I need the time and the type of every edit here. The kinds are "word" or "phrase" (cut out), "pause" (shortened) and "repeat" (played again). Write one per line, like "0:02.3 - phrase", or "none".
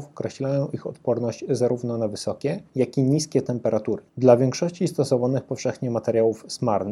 0:02.7 - pause
0:04.1 - pause